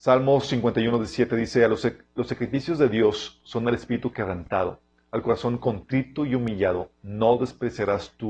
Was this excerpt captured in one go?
yes; 0 cuts

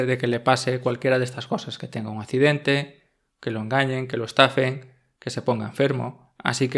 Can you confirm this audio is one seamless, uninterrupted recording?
yes; 0 cuts

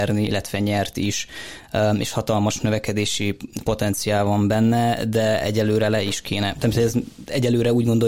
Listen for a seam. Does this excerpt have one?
no; 0 cuts

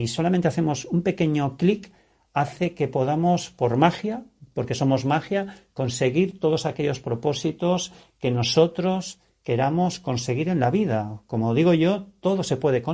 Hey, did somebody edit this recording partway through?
no; 0 cuts

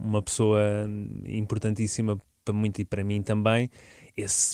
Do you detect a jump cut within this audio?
yes; 1 cut; at 2.8 s

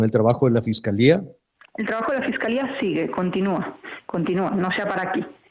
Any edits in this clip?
no; 0 cuts

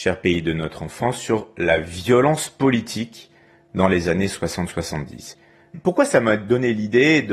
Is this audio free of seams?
yes; 0 cuts

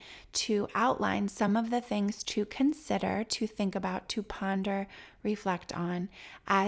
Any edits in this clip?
no; 0 cuts

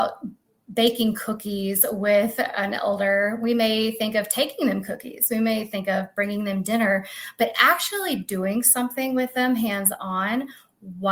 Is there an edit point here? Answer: no; 0 cuts

